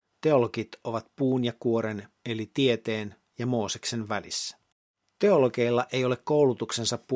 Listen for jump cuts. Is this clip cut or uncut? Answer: cut